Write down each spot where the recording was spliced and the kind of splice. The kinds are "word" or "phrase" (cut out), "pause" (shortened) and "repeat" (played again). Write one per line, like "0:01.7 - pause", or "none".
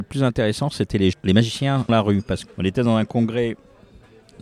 0:01.1 - word
0:01.9 - word
0:02.5 - word

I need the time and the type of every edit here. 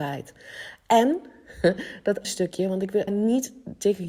0:02.2 - word
0:03.1 - word

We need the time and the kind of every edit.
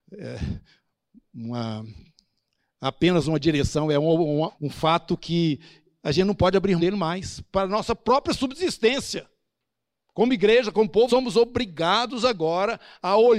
0:04.5 - word
0:06.8 - word
0:11.1 - phrase

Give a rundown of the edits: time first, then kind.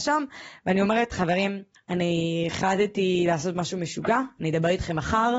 0:01.7 - pause

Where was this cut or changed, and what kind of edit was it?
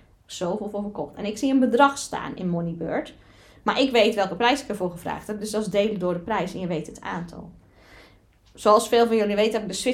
none

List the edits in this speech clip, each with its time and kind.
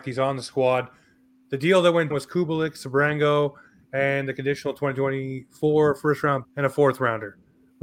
0:02.1 - word
0:06.4 - word

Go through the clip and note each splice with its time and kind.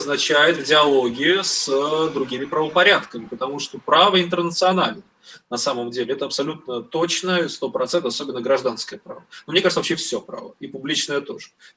none

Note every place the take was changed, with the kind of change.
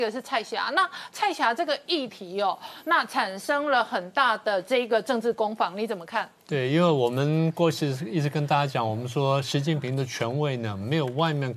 0:06.4 - pause

